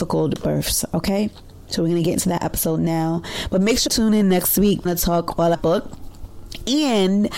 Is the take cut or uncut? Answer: cut